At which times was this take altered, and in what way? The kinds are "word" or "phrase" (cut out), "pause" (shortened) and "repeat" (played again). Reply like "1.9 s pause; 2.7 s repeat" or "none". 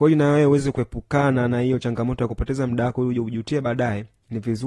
none